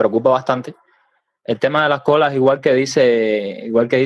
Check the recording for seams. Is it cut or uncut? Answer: uncut